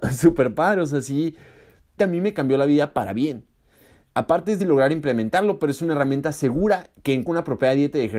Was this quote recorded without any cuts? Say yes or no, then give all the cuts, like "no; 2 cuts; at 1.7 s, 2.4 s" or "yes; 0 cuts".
no; 3 cuts; at 2.0 s, 4.6 s, 7.2 s